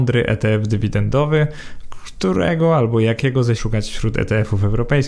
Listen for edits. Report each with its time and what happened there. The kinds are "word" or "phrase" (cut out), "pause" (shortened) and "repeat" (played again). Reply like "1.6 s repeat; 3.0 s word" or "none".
3.6 s word